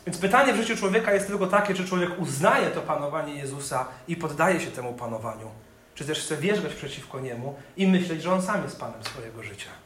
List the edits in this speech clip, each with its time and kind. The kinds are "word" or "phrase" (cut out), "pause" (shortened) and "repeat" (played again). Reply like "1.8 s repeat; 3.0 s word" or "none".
none